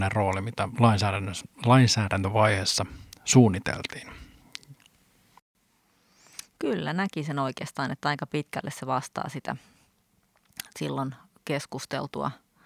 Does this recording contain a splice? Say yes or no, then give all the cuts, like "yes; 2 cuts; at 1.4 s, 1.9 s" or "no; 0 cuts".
no; 0 cuts